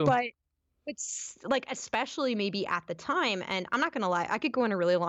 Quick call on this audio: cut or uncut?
uncut